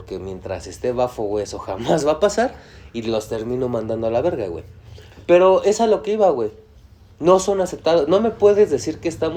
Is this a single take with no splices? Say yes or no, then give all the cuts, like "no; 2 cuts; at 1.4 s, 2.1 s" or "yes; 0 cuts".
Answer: yes; 0 cuts